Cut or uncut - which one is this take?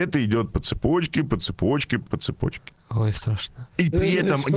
cut